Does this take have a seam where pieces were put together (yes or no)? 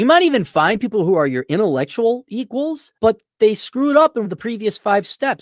yes